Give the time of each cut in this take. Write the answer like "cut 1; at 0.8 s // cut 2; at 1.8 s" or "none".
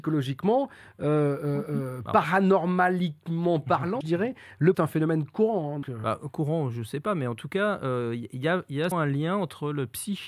cut 1; at 4.0 s // cut 2; at 4.7 s // cut 3; at 5.8 s // cut 4; at 8.9 s